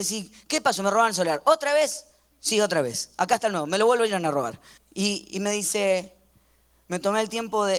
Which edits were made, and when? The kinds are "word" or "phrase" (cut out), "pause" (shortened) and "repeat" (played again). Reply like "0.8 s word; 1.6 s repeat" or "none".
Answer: 4.8 s pause